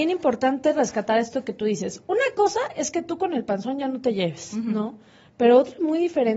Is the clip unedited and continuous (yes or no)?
yes